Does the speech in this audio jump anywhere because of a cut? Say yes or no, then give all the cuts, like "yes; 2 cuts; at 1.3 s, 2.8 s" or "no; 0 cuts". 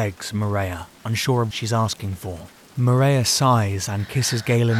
yes; 2 cuts; at 1.5 s, 2.6 s